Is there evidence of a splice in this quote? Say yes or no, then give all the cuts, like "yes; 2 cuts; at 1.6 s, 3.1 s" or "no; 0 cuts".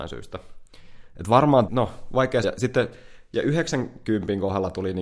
yes; 2 cuts; at 1.7 s, 2.4 s